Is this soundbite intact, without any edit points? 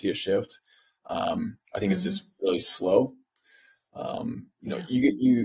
yes; 0 cuts

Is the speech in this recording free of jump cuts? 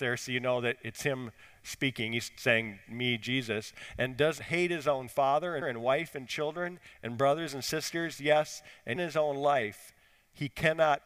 no; 3 cuts; at 4.4 s, 5.6 s, 9.0 s

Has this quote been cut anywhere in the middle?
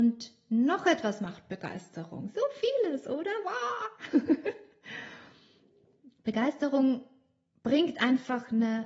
yes; 1 cut; at 6.2 s

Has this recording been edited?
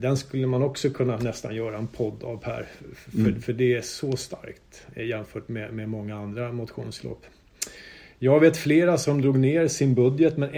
no; 0 cuts

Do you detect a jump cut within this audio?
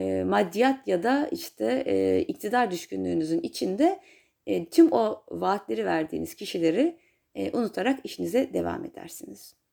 no; 0 cuts

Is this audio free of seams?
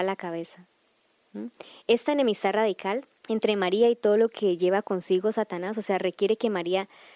no; 1 cut; at 3.2 s

